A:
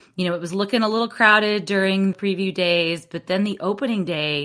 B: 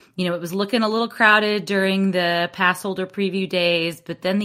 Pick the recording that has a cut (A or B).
A